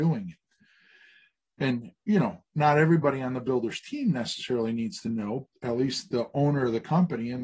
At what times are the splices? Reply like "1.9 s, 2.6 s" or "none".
5.5 s